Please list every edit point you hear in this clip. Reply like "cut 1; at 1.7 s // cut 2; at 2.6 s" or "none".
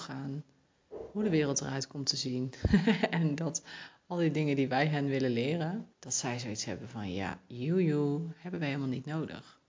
cut 1; at 5.9 s